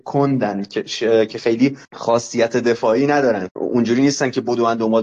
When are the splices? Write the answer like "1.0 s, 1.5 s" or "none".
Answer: 1.8 s, 3.5 s